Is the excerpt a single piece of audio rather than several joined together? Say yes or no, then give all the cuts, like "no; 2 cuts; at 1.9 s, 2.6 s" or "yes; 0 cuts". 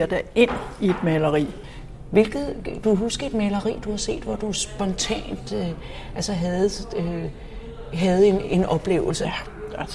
no; 2 cuts; at 2.8 s, 8.4 s